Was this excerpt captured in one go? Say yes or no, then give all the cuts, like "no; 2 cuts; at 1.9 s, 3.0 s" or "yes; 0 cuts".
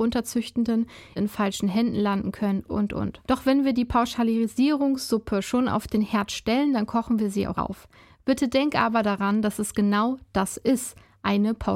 no; 4 cuts; at 1.2 s, 2.7 s, 3.2 s, 7.5 s